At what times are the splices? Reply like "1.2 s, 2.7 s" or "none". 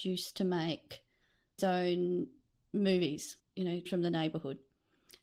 1.6 s, 3.4 s, 3.9 s